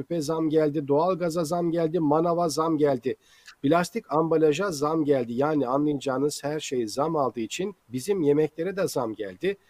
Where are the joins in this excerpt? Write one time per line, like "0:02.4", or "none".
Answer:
0:07.8

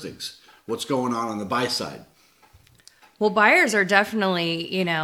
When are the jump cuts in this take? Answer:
none

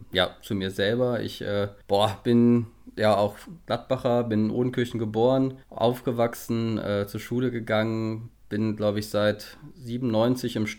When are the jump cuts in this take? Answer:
0:01.8
0:05.6

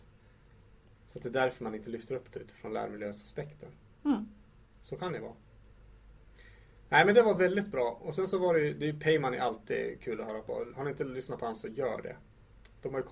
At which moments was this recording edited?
none

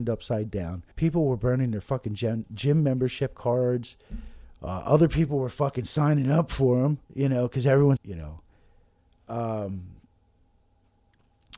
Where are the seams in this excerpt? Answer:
0:00.9
0:07.0
0:08.0

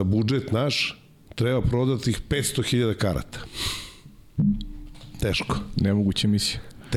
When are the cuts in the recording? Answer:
none

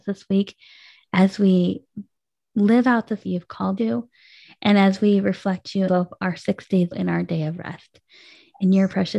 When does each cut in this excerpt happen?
0:03.2
0:03.8
0:05.9
0:06.9

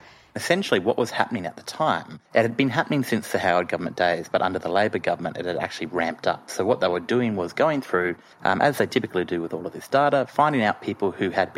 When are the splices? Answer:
0:02.3
0:08.3

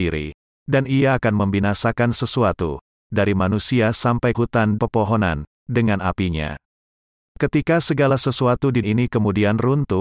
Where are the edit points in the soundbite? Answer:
0:02.1
0:04.3
0:04.8
0:08.8

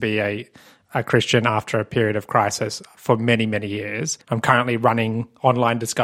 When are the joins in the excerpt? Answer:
0:04.2

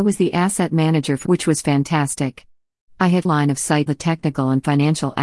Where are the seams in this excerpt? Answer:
0:01.3
0:03.2
0:03.9

